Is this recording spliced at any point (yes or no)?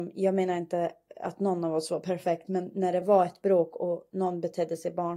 no